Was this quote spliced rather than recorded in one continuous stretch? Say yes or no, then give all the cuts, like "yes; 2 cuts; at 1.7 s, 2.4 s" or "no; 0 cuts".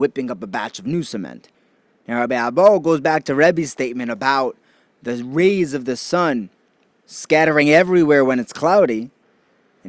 no; 0 cuts